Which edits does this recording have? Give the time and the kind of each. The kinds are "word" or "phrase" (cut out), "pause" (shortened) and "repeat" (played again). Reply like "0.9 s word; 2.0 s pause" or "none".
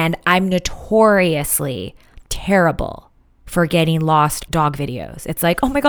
2.2 s pause; 4.5 s word

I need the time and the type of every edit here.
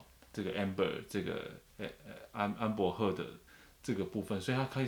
3.5 s pause

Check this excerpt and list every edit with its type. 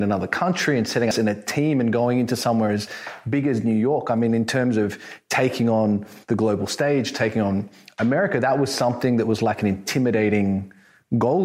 1.1 s phrase; 6.2 s pause

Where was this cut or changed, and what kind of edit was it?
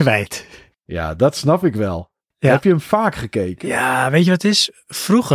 none

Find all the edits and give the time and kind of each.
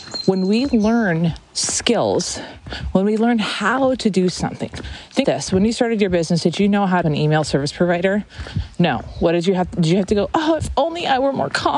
5.2 s word; 7.0 s phrase

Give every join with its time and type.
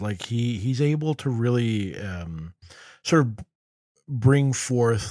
none

